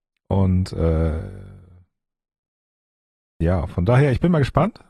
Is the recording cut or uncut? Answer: uncut